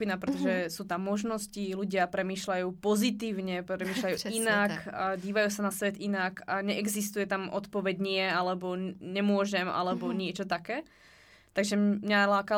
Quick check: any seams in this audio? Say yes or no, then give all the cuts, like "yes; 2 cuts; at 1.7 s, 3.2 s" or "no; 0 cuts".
no; 0 cuts